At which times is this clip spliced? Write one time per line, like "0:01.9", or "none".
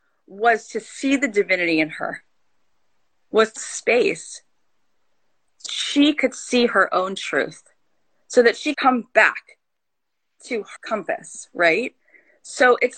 0:03.6
0:05.7
0:08.7
0:10.8